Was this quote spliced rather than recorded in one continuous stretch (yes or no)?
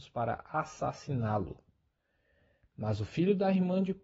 no